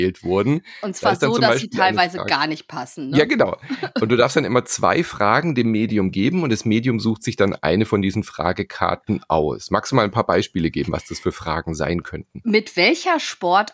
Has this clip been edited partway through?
no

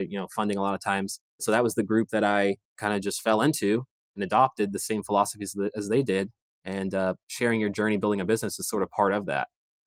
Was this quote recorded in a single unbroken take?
yes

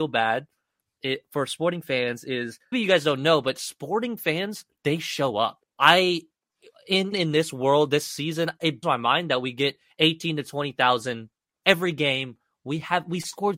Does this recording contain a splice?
yes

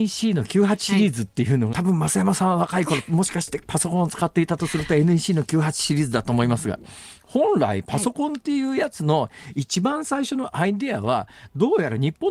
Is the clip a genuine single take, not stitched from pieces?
no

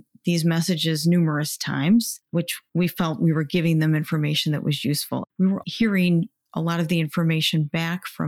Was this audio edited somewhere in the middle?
yes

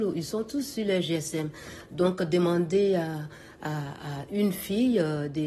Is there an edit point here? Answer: no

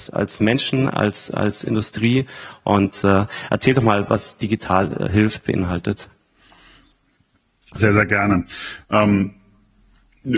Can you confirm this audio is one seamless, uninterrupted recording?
yes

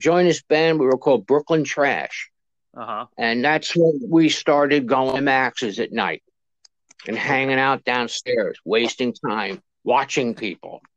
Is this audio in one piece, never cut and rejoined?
yes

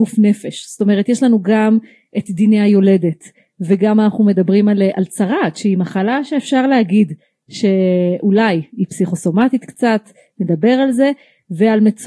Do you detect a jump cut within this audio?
no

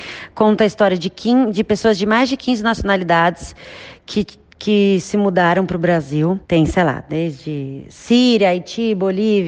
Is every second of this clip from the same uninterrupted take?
no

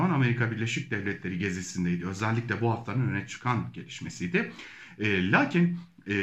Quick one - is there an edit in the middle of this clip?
no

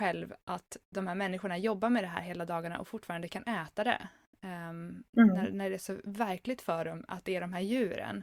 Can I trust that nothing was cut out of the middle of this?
yes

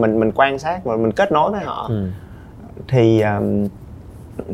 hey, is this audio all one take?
yes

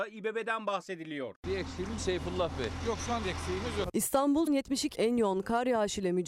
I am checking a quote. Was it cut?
yes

